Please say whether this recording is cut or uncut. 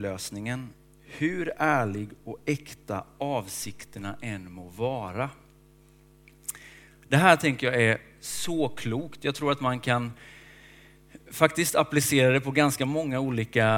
uncut